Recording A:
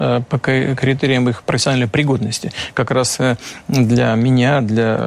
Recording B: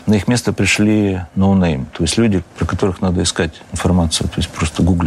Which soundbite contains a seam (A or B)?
B